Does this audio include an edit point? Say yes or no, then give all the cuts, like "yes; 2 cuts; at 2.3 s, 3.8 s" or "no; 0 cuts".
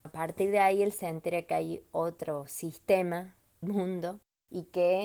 yes; 1 cut; at 3.6 s